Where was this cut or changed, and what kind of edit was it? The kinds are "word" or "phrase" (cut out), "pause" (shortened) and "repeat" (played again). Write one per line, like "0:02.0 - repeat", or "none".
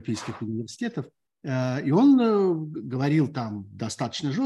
0:01.3 - pause